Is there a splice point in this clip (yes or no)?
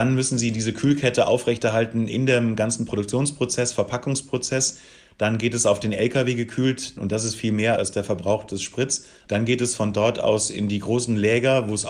no